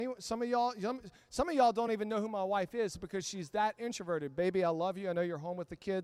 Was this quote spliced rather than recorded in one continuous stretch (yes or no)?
no